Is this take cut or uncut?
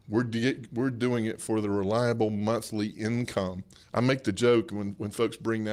cut